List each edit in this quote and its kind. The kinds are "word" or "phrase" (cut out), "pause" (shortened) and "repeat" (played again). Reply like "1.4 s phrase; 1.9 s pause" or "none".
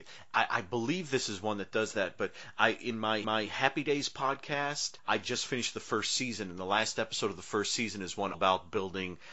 3.2 s repeat; 5.0 s pause; 8.3 s word